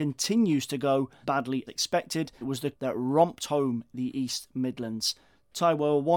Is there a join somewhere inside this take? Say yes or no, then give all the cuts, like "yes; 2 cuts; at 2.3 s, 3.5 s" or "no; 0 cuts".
yes; 5 cuts; at 1.2 s, 1.7 s, 2.4 s, 2.7 s, 3.9 s